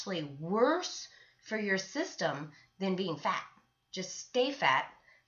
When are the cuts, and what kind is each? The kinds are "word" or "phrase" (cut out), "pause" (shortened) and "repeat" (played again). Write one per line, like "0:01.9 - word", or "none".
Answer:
none